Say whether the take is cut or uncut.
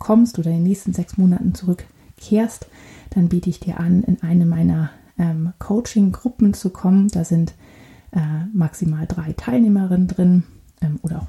uncut